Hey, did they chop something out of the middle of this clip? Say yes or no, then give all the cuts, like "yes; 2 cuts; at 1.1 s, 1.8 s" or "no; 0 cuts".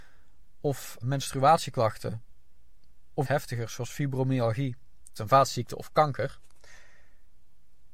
yes; 3 cuts; at 1.0 s, 3.2 s, 5.1 s